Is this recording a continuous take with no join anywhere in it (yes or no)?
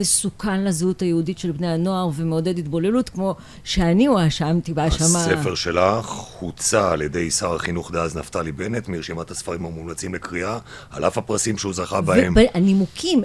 yes